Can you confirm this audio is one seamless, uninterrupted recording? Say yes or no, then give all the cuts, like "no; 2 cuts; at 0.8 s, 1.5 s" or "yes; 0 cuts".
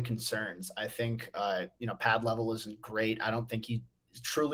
yes; 0 cuts